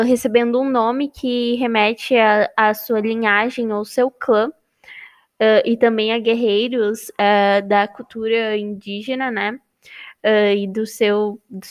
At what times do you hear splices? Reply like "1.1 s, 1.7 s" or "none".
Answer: none